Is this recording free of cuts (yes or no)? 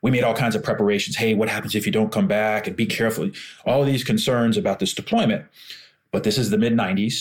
yes